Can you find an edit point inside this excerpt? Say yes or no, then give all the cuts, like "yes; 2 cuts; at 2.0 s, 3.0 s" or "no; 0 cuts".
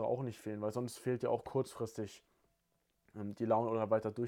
no; 0 cuts